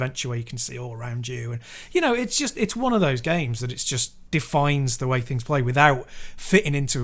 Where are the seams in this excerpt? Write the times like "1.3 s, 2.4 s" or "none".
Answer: 4.3 s